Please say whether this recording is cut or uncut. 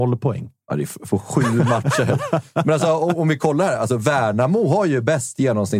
uncut